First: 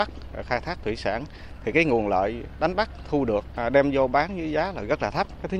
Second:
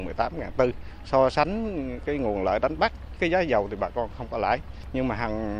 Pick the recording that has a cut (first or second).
second